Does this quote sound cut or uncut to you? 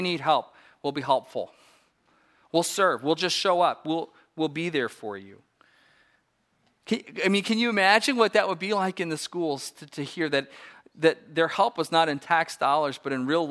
uncut